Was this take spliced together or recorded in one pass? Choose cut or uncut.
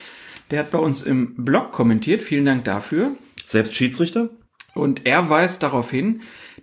uncut